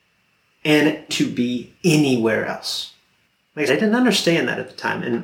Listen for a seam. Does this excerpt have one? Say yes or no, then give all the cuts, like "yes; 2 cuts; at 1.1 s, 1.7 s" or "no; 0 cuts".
yes; 4 cuts; at 1.1 s, 1.8 s, 3.3 s, 3.7 s